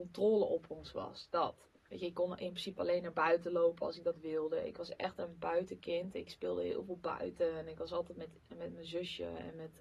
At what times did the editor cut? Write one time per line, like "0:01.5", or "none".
0:01.8